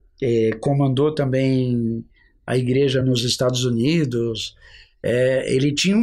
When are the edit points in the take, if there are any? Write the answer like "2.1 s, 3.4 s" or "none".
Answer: none